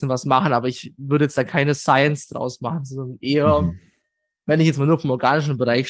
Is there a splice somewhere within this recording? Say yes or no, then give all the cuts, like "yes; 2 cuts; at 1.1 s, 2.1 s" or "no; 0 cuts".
no; 0 cuts